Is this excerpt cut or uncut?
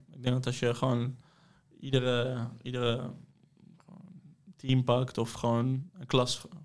uncut